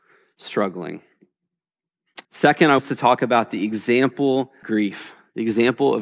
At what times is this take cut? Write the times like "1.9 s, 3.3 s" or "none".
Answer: 2.2 s, 2.8 s, 4.6 s